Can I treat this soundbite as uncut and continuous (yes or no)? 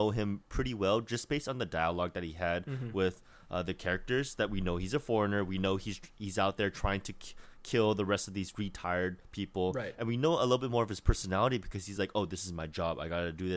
yes